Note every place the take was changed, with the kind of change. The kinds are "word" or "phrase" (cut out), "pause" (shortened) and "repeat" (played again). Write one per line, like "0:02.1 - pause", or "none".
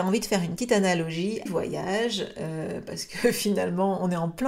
0:01.5 - phrase